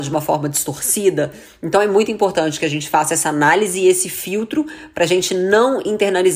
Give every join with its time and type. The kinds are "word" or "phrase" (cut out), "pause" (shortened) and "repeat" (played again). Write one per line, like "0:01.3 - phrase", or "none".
none